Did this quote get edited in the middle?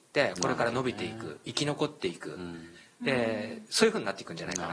no; 0 cuts

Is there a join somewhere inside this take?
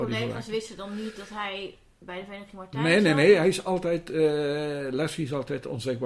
no; 0 cuts

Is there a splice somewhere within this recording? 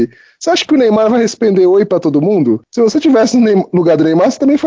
no; 0 cuts

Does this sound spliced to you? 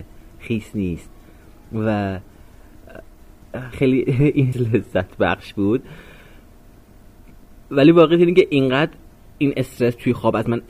yes; 3 cuts; at 3.7 s, 4.5 s, 7.6 s

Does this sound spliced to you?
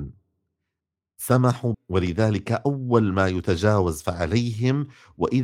yes; 1 cut; at 1.7 s

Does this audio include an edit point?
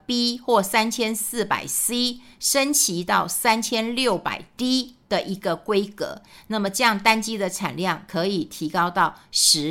no; 0 cuts

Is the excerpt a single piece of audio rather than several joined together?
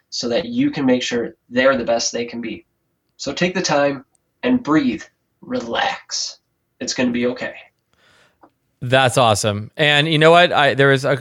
yes; 0 cuts

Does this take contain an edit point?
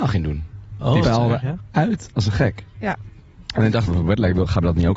yes; 2 cuts; at 1.0 s, 3.9 s

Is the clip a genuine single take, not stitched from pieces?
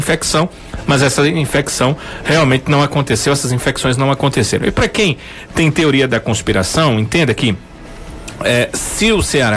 yes; 0 cuts

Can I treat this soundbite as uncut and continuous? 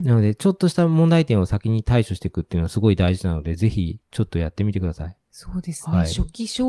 no; 1 cut; at 5.2 s

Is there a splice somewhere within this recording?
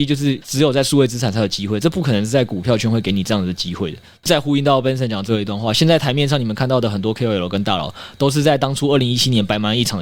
no; 0 cuts

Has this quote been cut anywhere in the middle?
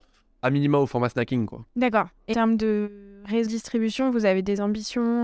yes; 3 cuts; at 1.7 s, 2.3 s, 3.5 s

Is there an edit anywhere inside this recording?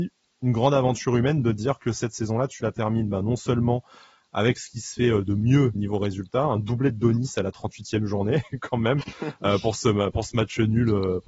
yes; 1 cut; at 5.7 s

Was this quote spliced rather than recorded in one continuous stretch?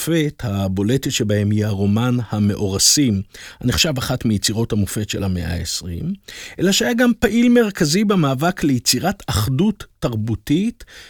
no; 0 cuts

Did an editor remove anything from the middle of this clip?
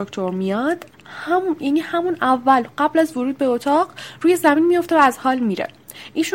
no; 0 cuts

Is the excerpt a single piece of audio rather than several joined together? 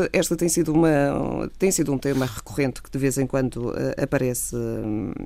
yes; 0 cuts

